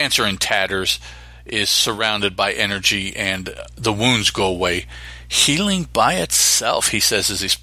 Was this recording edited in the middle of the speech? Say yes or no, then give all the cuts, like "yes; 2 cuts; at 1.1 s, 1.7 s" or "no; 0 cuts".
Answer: no; 0 cuts